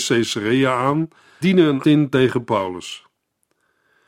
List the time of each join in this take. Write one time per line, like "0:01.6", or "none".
0:01.4
0:01.8